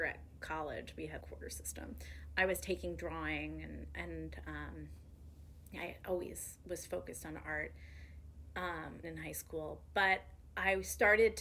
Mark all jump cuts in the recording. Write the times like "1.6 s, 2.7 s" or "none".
1.2 s, 9.0 s